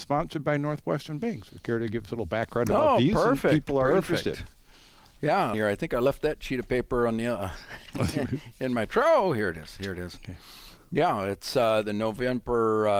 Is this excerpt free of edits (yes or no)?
no